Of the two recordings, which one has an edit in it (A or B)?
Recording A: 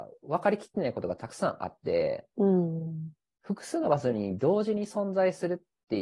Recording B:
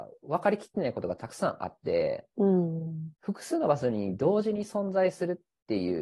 B